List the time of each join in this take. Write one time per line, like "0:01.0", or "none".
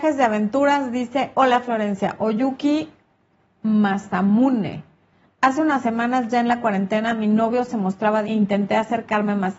0:08.2